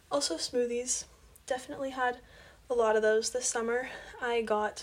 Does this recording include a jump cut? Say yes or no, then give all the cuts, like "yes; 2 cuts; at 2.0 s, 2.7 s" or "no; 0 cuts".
no; 0 cuts